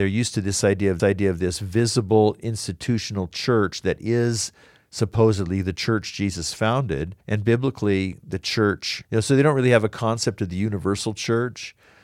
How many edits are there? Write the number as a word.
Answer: three